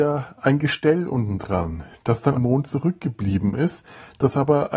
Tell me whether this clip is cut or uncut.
cut